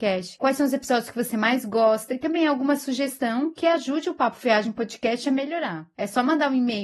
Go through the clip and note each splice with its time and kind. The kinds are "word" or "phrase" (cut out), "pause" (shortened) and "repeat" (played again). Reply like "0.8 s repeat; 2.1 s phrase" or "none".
none